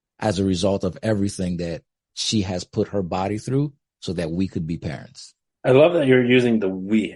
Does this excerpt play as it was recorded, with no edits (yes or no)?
no